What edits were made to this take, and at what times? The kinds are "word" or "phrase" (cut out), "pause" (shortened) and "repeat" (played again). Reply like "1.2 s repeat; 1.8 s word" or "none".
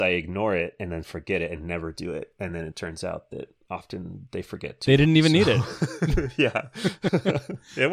none